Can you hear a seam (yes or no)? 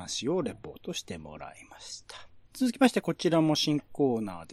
yes